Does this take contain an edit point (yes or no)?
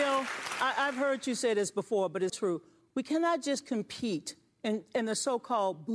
yes